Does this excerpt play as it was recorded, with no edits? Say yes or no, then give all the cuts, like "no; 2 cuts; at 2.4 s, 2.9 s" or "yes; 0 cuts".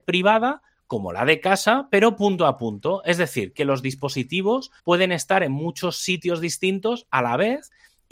no; 1 cut; at 4.8 s